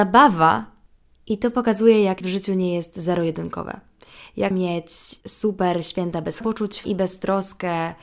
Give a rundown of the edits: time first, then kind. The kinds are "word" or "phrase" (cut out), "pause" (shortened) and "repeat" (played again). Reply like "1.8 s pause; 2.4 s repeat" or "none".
2.2 s word; 4.5 s word; 5.2 s pause; 6.4 s phrase; 6.8 s word